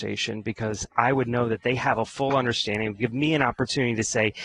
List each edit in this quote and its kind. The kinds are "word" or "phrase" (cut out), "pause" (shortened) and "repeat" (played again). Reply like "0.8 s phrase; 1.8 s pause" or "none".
none